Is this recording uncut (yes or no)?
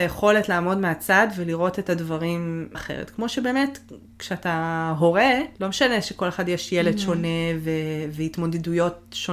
no